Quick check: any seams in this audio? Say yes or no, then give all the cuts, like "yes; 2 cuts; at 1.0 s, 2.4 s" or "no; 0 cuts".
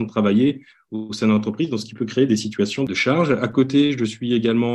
no; 0 cuts